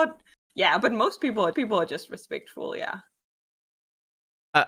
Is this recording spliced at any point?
yes; 1 cut; at 1.5 s

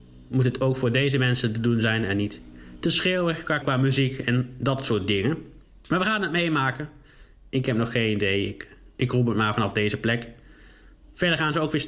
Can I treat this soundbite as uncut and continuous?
no; 1 cut; at 3.6 s

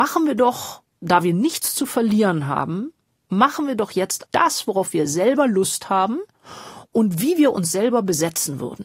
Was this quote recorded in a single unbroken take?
no; 1 cut; at 4.3 s

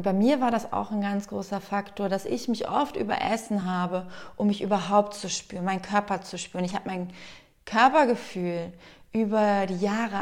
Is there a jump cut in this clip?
no; 0 cuts

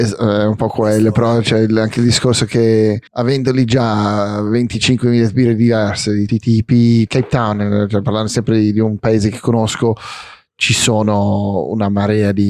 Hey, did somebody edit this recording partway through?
yes; 3 cuts; at 3.1 s, 6.3 s, 7.1 s

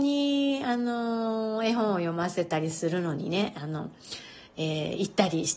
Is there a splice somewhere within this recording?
no; 0 cuts

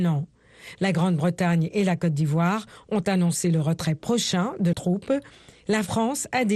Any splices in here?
yes; 1 cut; at 4.7 s

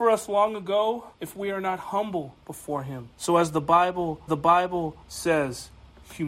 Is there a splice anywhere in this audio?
yes; 3 cuts; at 1.1 s, 3.1 s, 4.3 s

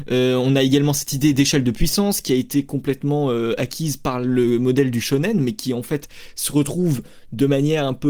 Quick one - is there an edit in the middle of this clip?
no; 0 cuts

